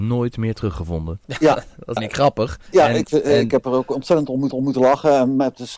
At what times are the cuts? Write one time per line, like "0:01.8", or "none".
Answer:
0:01.2
0:02.0
0:02.7
0:04.5

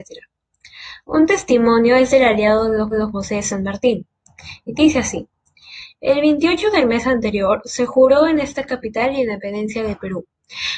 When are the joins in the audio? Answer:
0:02.9

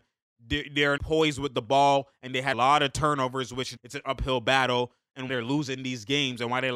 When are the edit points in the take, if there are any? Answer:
0:01.0
0:02.5
0:03.8
0:05.3

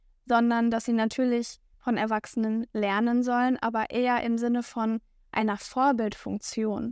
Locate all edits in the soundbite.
none

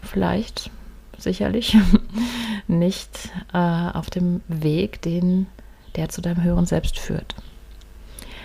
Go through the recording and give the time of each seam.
none

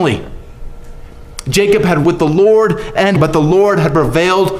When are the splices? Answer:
0:02.0
0:03.2

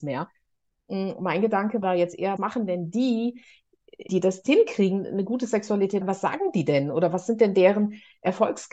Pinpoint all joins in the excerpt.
0:01.8
0:02.4
0:04.1
0:04.5
0:06.0

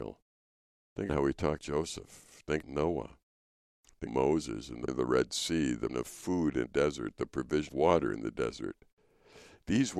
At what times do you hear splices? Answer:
0:01.1
0:01.6
0:02.6
0:04.1
0:04.9
0:05.9
0:06.7
0:07.7

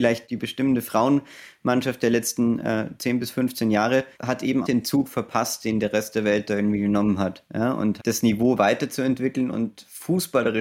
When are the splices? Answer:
0:04.1
0:04.6
0:08.0

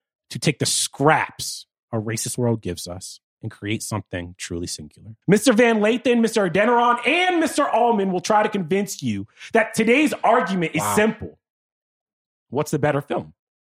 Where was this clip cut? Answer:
0:01.7
0:03.3
0:05.2

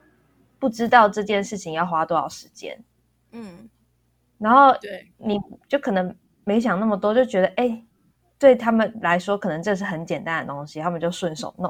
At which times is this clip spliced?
none

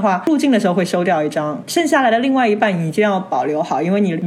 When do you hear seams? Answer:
none

